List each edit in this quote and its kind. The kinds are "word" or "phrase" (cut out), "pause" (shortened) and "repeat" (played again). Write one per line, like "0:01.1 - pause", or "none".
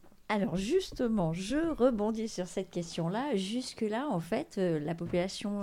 none